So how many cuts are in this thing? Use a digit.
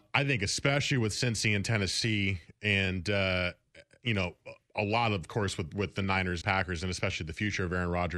1